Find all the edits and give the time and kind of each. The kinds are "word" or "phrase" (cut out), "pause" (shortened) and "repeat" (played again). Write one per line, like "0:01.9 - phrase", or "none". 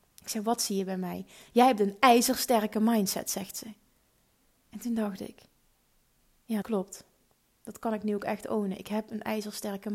0:06.6 - word